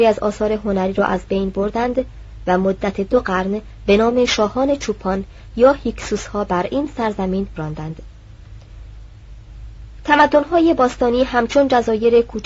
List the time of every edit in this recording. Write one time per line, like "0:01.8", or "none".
0:07.6